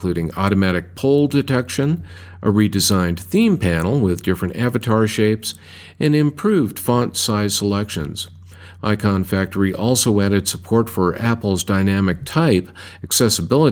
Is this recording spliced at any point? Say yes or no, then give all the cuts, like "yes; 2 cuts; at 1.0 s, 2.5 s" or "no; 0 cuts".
no; 0 cuts